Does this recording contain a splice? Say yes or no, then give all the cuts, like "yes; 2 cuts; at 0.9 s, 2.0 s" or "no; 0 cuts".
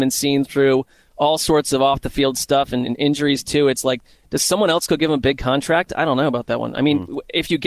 no; 0 cuts